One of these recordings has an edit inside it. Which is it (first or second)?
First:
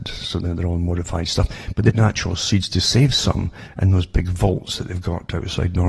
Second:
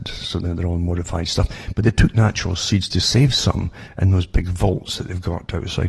first